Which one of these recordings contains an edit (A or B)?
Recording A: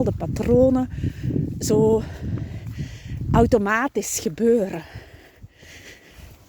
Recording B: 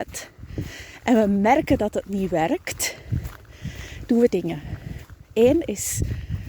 B